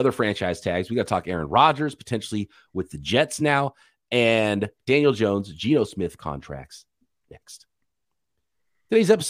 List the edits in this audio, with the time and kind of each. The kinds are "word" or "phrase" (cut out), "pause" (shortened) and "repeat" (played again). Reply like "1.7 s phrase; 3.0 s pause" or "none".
none